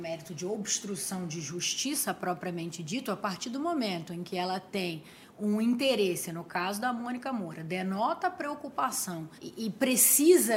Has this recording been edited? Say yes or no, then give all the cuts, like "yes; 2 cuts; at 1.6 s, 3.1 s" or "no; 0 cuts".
yes; 1 cut; at 9.4 s